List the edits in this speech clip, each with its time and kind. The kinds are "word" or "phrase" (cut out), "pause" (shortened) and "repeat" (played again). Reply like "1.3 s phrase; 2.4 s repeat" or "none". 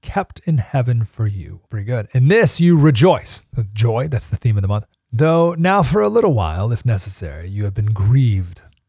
1.7 s pause; 4.9 s pause

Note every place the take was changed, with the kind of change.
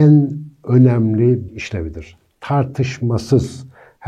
1.5 s word

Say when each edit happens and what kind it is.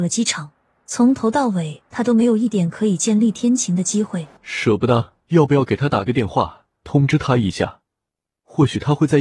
4.4 s pause; 5.2 s pause; 6.7 s pause

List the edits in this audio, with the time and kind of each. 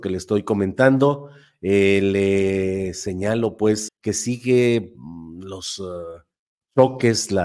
3.9 s word

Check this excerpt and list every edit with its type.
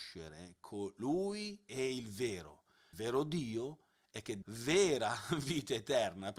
1.7 s word; 2.9 s word; 4.4 s word

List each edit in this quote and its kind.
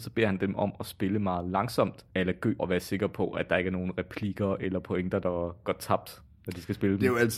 2.6 s phrase

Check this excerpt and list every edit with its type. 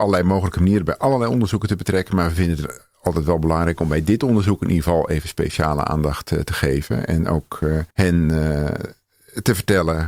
7.9 s pause

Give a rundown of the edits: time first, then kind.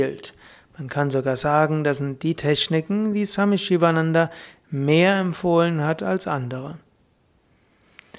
none

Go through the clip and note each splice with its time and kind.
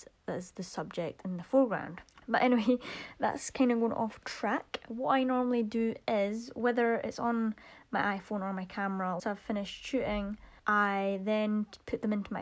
2.1 s pause; 9.2 s word; 10.6 s pause

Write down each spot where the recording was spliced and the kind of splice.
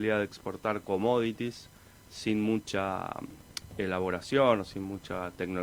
none

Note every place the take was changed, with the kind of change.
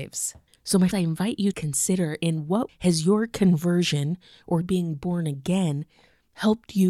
0.9 s word; 1.5 s word; 2.7 s word; 4.6 s word

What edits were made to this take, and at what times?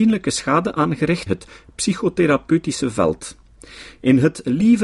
1.3 s word

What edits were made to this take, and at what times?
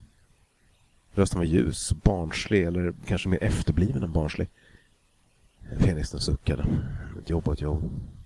none

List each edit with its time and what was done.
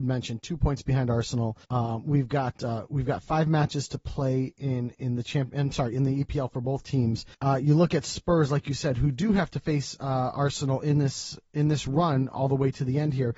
1.6 s pause; 7.3 s pause

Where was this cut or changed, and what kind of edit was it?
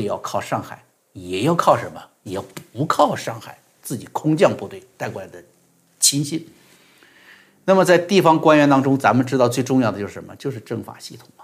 none

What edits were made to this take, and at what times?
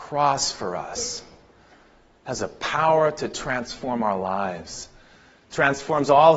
none

